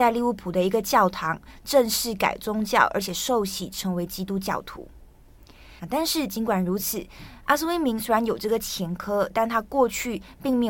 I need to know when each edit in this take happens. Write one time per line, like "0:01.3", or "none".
0:05.8